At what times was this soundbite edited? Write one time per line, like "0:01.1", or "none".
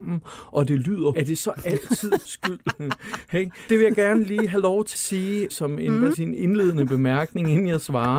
0:01.1
0:02.2
0:03.7
0:04.9
0:05.5
0:06.1